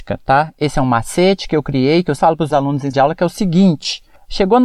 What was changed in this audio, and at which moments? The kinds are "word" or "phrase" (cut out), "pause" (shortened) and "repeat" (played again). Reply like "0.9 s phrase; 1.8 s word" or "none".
2.2 s word; 2.5 s word; 2.9 s word